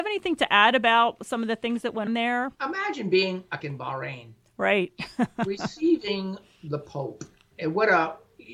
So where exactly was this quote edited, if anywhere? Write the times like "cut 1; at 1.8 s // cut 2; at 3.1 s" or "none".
cut 1; at 2.1 s // cut 2; at 2.5 s // cut 3; at 3.6 s // cut 4; at 7.5 s